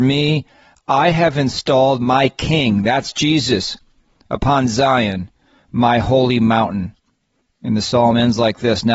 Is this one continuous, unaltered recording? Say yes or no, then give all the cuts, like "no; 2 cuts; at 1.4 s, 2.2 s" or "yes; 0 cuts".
yes; 0 cuts